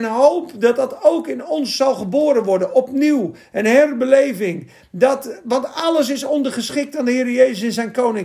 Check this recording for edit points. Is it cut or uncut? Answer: uncut